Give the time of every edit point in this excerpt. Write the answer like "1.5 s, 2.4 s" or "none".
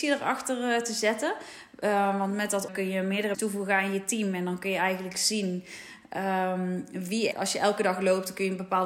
2.7 s, 3.3 s, 7.3 s